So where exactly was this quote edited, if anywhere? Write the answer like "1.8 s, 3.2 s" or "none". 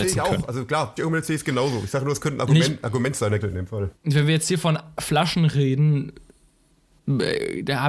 1.0 s, 3.4 s